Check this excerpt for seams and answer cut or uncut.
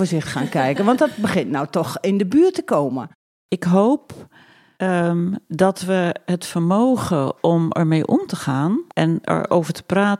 cut